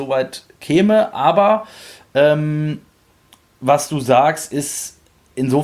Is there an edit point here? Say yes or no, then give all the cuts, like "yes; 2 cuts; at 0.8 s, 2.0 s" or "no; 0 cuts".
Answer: no; 0 cuts